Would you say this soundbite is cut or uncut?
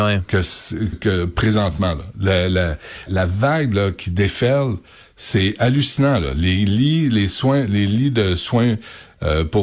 cut